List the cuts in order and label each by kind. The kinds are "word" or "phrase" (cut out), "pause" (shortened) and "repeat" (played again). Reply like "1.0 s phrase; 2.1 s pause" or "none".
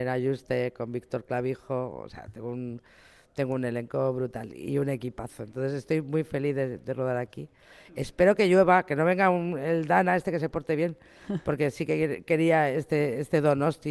none